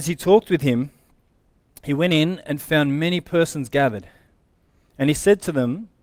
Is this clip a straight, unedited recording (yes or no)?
yes